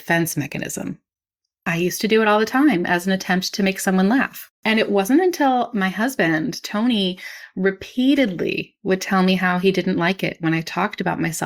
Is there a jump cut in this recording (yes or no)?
no